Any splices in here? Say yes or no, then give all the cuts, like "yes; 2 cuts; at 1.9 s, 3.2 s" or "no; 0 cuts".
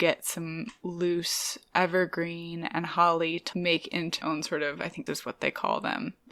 yes; 3 cuts; at 3.5 s, 4.2 s, 5.1 s